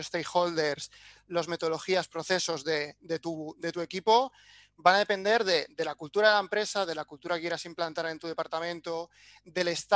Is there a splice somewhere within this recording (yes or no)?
no